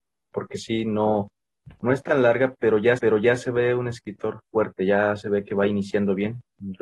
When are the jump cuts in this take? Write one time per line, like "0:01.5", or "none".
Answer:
0:03.0
0:04.4